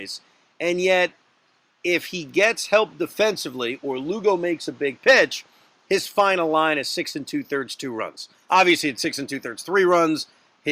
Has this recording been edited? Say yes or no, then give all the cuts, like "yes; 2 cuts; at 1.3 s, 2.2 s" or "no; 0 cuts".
no; 0 cuts